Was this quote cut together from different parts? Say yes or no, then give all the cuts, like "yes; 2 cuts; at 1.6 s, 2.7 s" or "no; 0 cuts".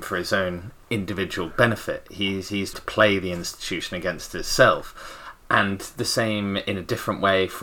yes; 2 cuts; at 2.7 s, 5.4 s